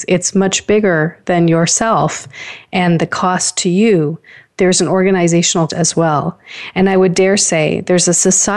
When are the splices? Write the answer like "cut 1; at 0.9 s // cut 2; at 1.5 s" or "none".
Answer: cut 1; at 5.7 s